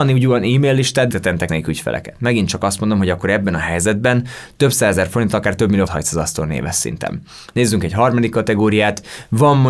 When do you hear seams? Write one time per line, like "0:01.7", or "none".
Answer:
0:01.1
0:01.5
0:05.9